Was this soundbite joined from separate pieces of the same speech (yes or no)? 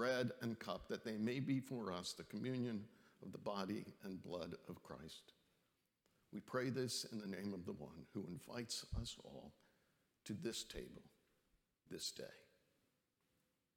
no